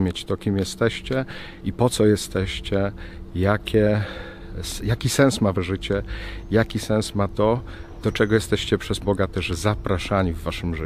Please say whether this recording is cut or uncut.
cut